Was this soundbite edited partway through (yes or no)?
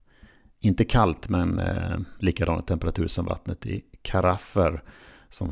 no